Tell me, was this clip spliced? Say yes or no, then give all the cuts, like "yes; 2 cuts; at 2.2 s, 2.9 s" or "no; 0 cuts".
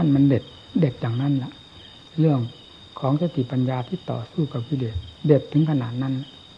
yes; 1 cut; at 5.2 s